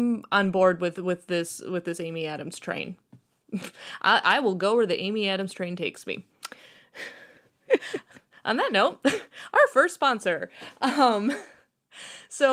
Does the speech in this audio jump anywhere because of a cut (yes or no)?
no